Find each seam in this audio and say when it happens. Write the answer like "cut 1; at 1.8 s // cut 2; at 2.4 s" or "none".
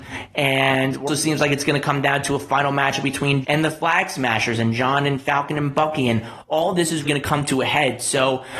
cut 1; at 1.1 s // cut 2; at 3.4 s // cut 3; at 7.0 s